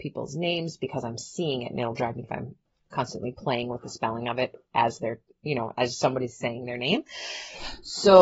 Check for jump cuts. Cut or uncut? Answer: cut